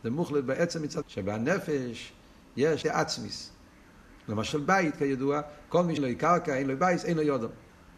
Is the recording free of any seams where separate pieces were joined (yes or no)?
no